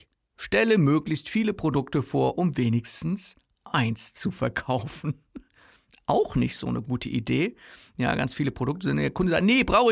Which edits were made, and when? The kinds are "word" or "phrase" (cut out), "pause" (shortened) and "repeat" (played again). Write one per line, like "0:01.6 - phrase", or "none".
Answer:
none